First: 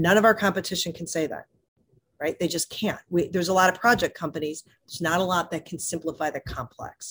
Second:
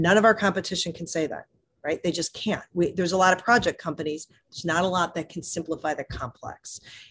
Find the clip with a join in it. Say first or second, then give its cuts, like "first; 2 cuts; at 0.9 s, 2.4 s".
second; 1 cut; at 1.6 s